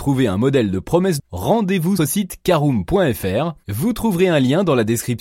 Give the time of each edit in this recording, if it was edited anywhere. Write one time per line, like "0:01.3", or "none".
0:01.2
0:02.0